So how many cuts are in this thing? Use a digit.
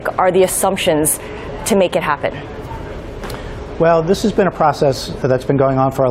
0